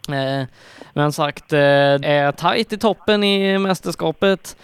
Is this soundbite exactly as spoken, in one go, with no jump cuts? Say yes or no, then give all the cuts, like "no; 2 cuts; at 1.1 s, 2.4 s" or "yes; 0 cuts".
no; 2 cuts; at 1.1 s, 2.0 s